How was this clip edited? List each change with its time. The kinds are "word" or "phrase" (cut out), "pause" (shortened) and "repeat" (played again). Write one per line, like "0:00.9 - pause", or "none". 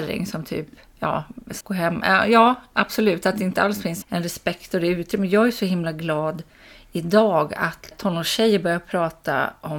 0:01.6 - word
0:04.0 - word
0:07.9 - word